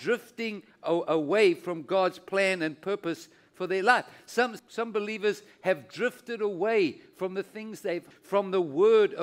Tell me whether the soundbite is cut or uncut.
cut